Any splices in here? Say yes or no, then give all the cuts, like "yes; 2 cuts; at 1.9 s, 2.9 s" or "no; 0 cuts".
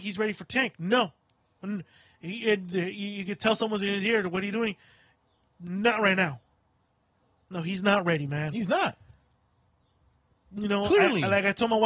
no; 0 cuts